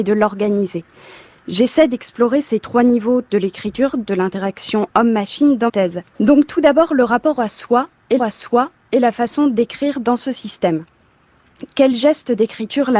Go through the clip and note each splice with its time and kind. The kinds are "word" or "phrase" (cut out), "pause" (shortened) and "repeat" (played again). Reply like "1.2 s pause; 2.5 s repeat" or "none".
5.7 s word; 6.1 s pause; 8.2 s repeat